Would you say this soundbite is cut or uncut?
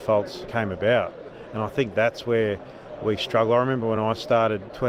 uncut